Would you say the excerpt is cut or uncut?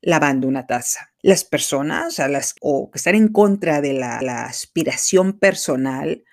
cut